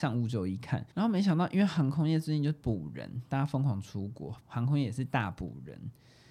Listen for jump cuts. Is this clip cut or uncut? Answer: cut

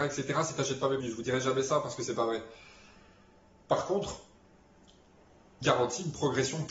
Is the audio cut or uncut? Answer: cut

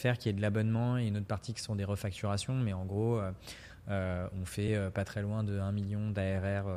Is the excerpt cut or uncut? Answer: uncut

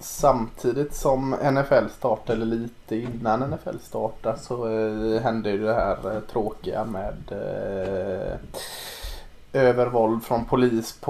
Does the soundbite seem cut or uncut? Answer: uncut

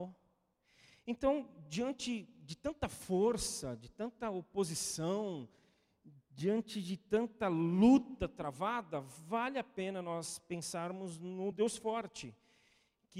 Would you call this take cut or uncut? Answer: uncut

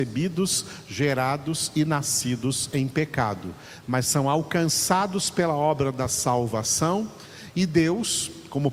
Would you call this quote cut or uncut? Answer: uncut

